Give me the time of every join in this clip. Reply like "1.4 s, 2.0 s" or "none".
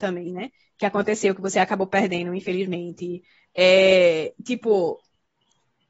none